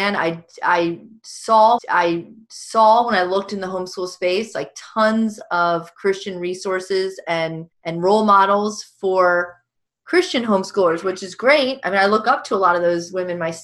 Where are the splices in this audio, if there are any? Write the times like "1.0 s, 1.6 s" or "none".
1.8 s, 7.7 s